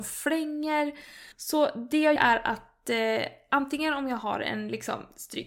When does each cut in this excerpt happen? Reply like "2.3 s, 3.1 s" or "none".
1.3 s, 2.2 s

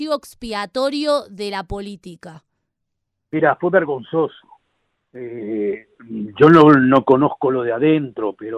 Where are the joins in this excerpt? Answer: none

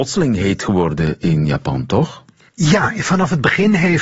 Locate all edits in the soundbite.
none

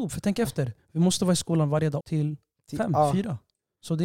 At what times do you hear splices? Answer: 2.0 s

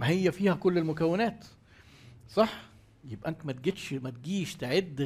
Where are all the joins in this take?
3.4 s

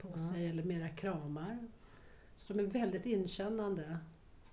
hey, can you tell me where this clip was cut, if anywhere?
none

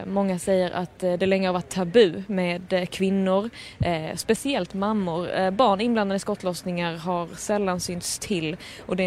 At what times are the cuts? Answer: none

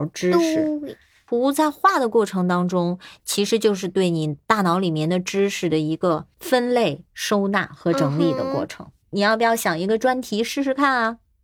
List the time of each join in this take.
9.0 s

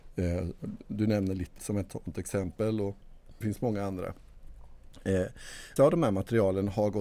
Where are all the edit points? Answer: 1.6 s, 3.4 s, 5.8 s

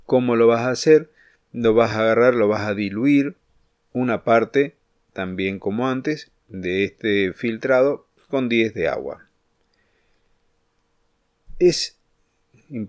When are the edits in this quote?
none

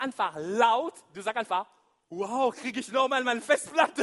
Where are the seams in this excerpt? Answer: none

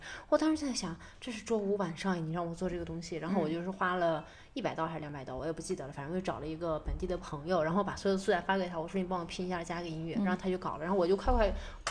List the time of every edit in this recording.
none

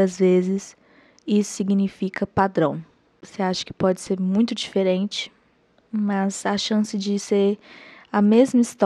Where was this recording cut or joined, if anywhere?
none

